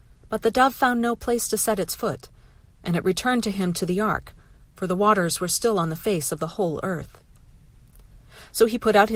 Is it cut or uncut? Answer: uncut